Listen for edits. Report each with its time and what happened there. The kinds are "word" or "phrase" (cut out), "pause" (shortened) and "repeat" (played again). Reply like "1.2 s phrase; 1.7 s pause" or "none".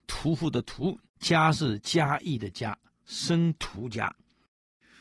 1.1 s pause